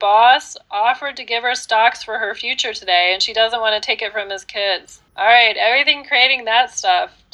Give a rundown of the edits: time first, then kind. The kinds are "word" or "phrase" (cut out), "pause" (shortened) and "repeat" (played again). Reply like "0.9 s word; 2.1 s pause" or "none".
5.1 s pause